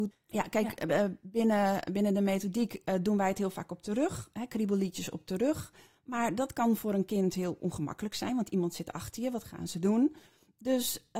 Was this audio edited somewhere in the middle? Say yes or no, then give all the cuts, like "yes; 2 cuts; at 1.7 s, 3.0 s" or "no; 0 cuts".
no; 0 cuts